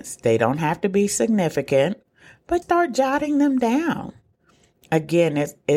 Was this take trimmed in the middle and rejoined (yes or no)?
yes